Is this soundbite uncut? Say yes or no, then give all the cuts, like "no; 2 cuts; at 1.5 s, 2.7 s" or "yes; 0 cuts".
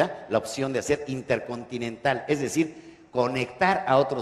yes; 0 cuts